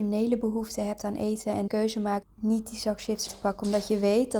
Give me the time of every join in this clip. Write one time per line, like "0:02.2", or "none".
0:01.7
0:02.2
0:03.3